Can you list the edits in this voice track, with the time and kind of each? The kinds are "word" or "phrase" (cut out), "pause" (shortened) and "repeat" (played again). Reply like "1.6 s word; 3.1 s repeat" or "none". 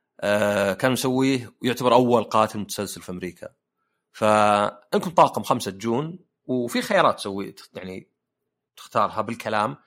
none

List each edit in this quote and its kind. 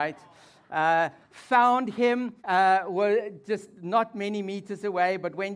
2.4 s pause

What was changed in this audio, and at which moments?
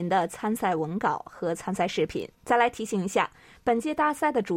2.3 s pause

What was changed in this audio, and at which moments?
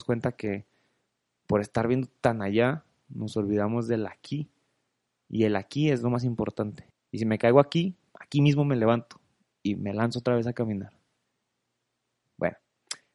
none

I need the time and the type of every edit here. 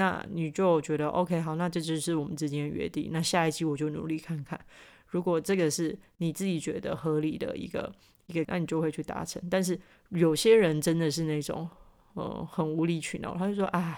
8.4 s word

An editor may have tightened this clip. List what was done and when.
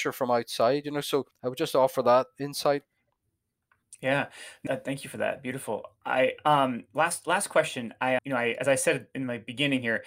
1.3 s pause; 4.7 s word; 8.2 s word

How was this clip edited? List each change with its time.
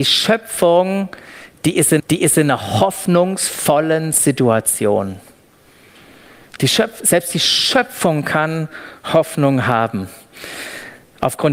2.0 s repeat

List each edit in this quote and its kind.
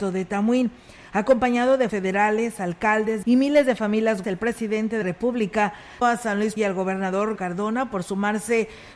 1.9 s word; 3.2 s word; 4.2 s word; 5.0 s word; 6.0 s word; 6.6 s word; 7.4 s word

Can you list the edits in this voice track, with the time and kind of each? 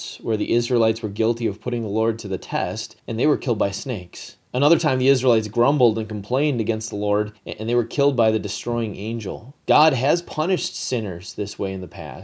3.0 s pause; 4.5 s pause; 7.4 s pause; 9.6 s pause

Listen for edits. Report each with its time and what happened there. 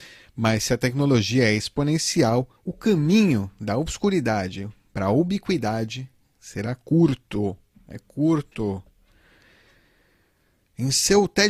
2.6 s pause

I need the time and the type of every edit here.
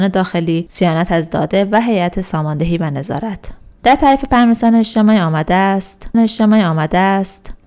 6.1 s repeat

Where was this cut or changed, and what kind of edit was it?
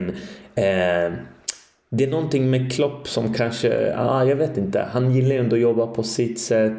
none

